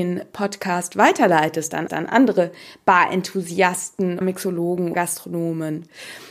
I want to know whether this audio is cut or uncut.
cut